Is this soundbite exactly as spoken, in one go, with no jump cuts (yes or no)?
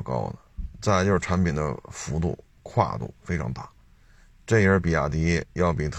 yes